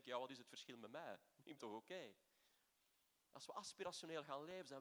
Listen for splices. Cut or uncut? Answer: cut